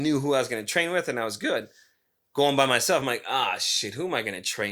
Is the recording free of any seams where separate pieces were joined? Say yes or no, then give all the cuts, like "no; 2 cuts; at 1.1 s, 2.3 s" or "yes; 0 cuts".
yes; 0 cuts